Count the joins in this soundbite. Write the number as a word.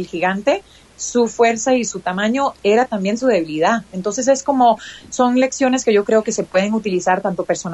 one